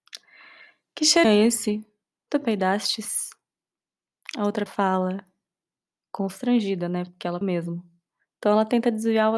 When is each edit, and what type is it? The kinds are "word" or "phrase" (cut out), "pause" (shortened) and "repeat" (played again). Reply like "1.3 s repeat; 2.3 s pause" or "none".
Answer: 1.2 s word; 4.7 s word; 7.4 s word